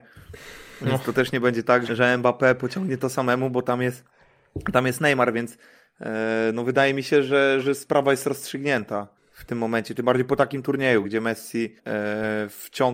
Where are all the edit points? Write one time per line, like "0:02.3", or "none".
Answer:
0:01.9
0:09.2
0:11.0
0:11.8